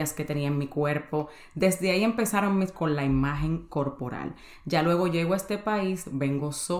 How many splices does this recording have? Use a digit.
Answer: 1